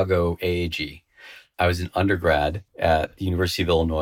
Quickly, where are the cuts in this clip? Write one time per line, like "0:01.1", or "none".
0:01.5
0:02.7